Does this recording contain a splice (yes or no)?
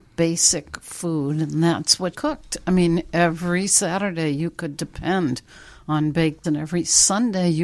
yes